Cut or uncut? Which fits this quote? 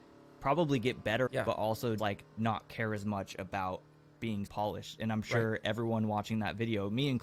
cut